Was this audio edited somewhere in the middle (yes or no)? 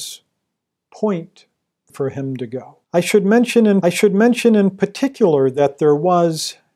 yes